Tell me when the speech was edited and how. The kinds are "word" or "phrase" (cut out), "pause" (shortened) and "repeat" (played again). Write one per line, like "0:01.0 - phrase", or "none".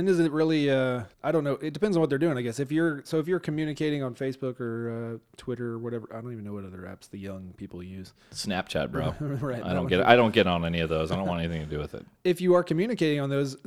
0:01.1 - pause